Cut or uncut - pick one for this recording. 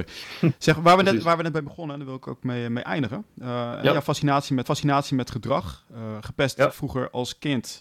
cut